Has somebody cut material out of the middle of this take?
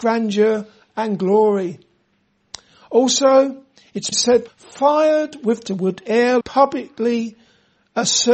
yes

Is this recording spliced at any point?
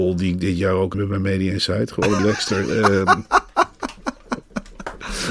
yes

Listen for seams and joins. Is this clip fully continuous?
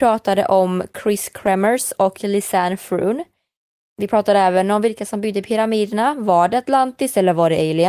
yes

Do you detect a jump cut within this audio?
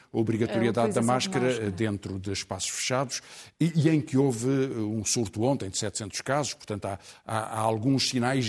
no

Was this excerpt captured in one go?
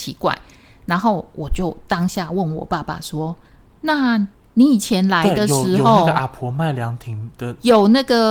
no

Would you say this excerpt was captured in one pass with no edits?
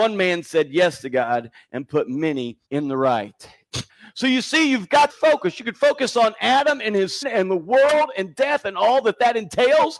no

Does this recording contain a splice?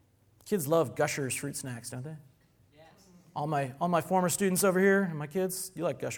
no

